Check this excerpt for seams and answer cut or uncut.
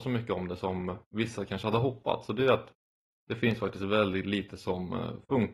uncut